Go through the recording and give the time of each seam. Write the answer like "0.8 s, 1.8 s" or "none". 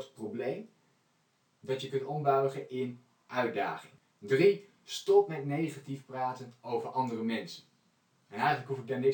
none